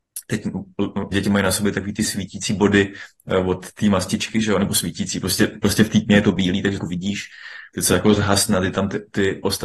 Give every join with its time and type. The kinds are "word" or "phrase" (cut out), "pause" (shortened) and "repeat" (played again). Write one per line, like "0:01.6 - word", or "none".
0:01.1 - word
0:06.8 - word